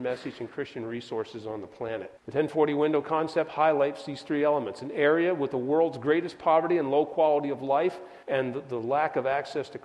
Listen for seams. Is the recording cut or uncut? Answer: cut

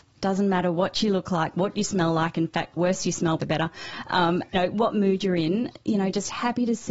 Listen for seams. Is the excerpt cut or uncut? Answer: cut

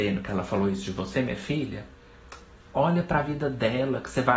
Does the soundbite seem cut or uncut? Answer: uncut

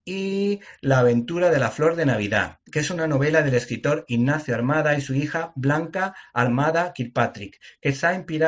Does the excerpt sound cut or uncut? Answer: uncut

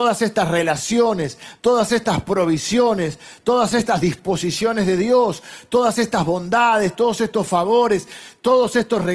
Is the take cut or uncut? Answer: uncut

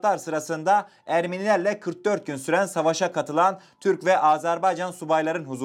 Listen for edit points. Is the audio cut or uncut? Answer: uncut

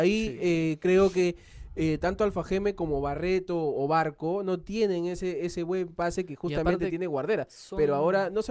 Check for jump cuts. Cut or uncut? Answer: uncut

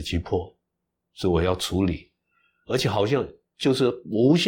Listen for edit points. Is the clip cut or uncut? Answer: uncut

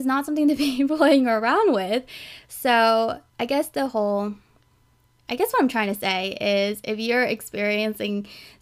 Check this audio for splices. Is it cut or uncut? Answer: cut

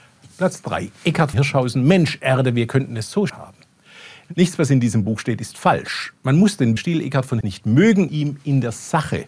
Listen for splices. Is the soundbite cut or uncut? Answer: cut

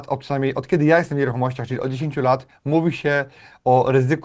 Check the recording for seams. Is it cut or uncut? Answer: uncut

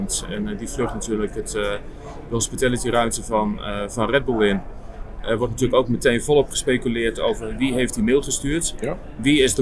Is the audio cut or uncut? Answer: uncut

